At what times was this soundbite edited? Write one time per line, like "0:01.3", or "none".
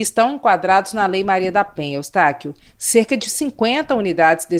none